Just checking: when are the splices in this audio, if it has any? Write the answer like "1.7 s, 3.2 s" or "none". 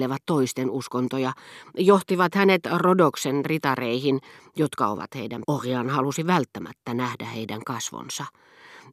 5.4 s